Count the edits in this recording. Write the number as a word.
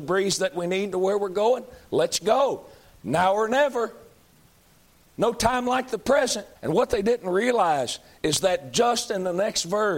two